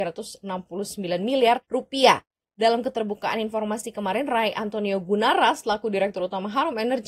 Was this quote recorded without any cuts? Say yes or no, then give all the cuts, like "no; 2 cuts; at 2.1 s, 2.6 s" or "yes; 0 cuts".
no; 1 cut; at 1.6 s